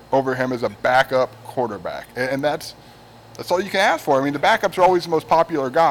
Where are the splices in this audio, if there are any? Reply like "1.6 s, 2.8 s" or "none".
none